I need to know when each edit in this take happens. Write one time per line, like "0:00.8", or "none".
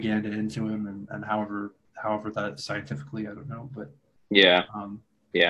0:01.9
0:02.6